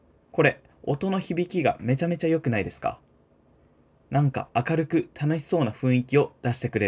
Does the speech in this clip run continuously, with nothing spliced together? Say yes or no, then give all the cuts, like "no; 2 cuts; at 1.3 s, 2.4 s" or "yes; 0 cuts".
yes; 0 cuts